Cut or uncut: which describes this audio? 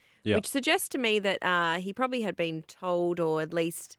uncut